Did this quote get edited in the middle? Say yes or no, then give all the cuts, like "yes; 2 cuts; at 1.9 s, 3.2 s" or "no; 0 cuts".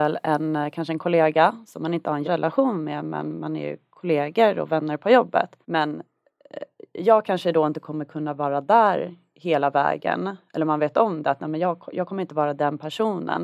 yes; 2 cuts; at 2.2 s, 5.6 s